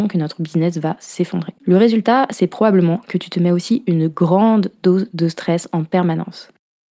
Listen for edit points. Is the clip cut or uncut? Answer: cut